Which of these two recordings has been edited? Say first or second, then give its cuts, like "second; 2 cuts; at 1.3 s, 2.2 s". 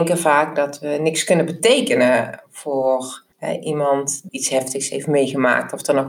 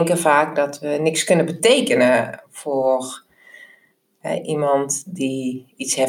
first; 2 cuts; at 3.3 s, 4.3 s